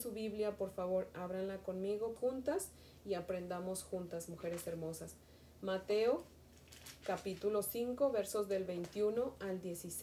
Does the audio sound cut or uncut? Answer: cut